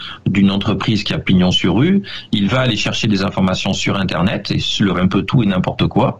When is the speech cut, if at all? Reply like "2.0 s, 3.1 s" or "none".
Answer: 4.9 s

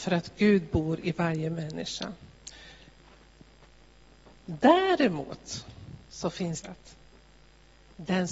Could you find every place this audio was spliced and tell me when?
6.6 s

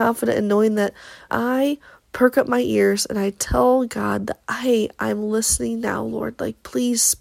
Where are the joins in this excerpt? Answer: 1.3 s

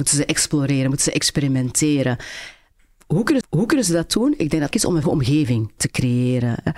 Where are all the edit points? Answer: 3.4 s, 4.7 s, 5.0 s, 5.8 s

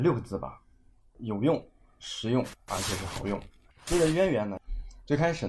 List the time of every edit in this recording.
none

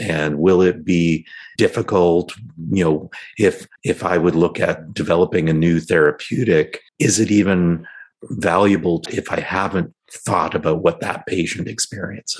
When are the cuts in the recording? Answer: 1.6 s, 3.8 s, 6.9 s, 9.1 s, 10.0 s

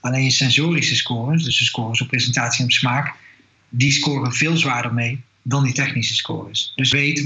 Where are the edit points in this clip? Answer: none

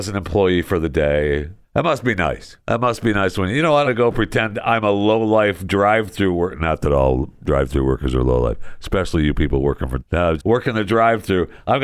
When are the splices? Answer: 1.6 s, 2.6 s, 3.8 s, 10.0 s, 10.4 s

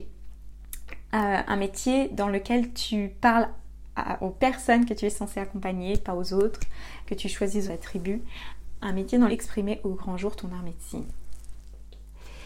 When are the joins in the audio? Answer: 4.2 s, 7.7 s, 8.8 s, 9.3 s

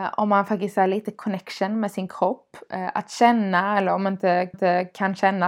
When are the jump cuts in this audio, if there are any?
4.5 s

